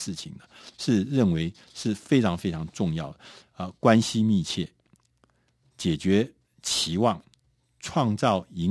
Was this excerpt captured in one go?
yes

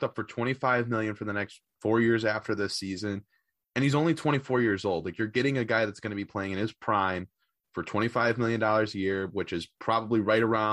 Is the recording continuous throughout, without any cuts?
yes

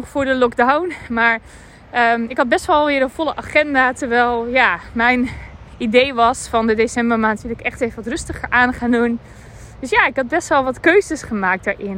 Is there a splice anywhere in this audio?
yes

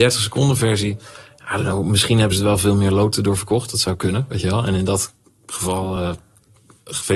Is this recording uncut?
yes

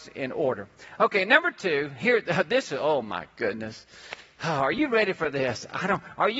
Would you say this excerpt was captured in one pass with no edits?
yes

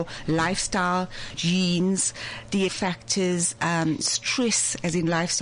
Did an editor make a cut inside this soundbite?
yes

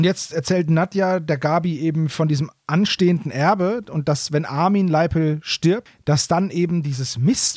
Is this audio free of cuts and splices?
yes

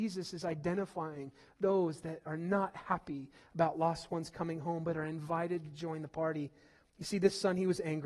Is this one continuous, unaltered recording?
yes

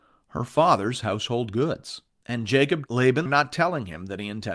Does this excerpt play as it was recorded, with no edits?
no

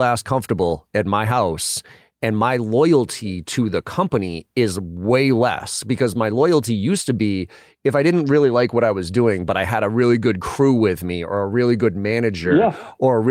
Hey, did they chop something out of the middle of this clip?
no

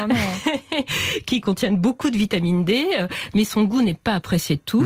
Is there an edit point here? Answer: no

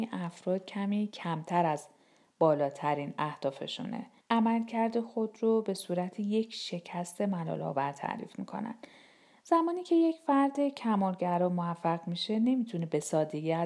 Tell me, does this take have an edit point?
yes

